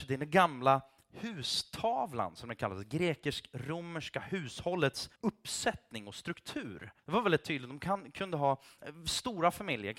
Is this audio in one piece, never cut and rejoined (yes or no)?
no